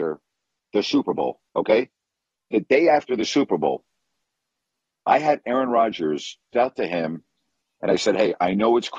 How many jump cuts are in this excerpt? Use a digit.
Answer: 2